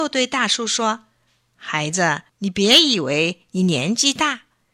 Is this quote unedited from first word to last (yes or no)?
no